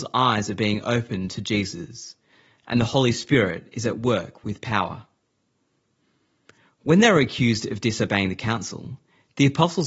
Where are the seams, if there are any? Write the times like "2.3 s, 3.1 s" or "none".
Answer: none